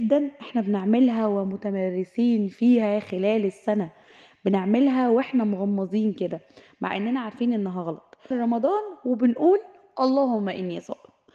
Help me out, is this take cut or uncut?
cut